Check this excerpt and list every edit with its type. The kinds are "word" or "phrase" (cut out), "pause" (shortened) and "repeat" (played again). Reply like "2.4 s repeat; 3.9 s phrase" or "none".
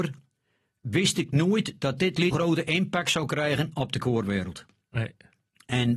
2.3 s word; 4.0 s word

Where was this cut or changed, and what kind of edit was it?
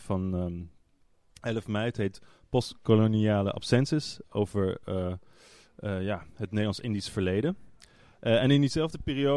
none

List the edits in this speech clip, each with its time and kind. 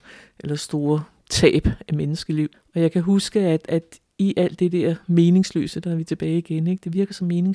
2.5 s pause

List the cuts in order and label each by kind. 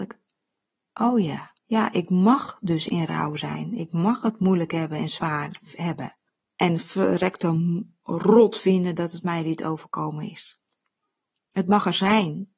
1.6 s pause; 6.3 s pause

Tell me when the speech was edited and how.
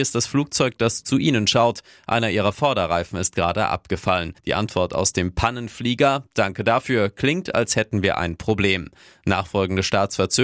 4.4 s pause

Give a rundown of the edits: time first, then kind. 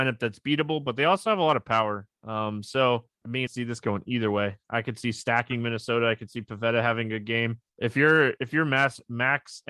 3.1 s pause; 3.5 s phrase; 7.7 s pause

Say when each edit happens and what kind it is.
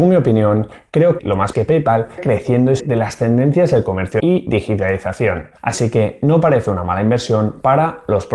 1.2 s word; 1.5 s phrase; 2.2 s word; 2.8 s word; 4.2 s word; 5.6 s pause

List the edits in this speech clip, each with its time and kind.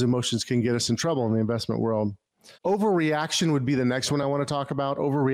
none

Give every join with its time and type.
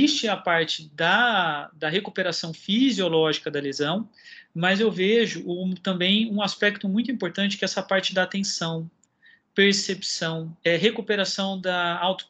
10.6 s pause

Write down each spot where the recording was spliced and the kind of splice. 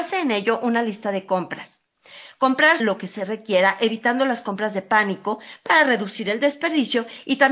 2.8 s word

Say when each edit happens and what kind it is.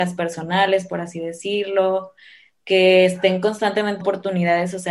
4.0 s word

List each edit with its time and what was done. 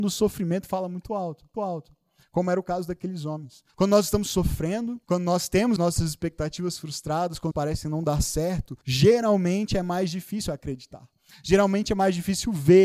1.5 s repeat; 3.7 s pause; 5.0 s pause; 5.8 s word; 7.5 s phrase; 8.8 s pause

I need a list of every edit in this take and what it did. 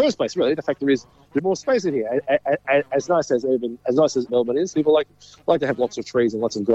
1.4 s word; 4.3 s word; 4.7 s word

